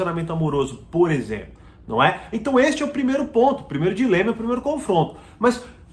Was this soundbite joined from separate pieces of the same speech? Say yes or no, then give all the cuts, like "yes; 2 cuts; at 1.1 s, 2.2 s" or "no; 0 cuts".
no; 0 cuts